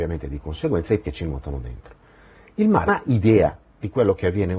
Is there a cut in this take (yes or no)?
yes